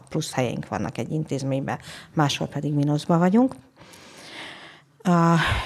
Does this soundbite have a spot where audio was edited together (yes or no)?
no